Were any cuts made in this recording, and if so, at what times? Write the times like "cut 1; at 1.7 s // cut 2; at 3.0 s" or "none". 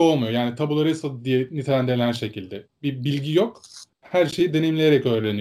cut 1; at 3.9 s